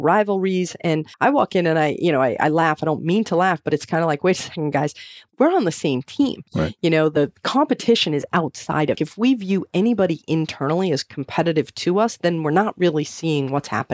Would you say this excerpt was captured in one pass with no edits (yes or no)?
no